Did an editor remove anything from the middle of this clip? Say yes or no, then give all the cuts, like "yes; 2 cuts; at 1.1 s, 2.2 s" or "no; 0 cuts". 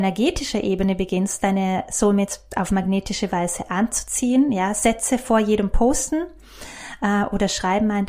no; 0 cuts